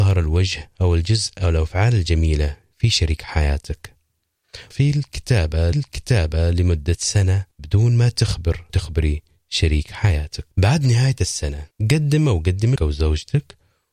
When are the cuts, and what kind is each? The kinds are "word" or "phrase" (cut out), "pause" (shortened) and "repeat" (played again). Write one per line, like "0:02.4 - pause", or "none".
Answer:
0:04.7 - word
0:05.7 - repeat
0:07.5 - pause
0:08.7 - word
0:10.5 - pause
0:11.7 - pause
0:12.8 - phrase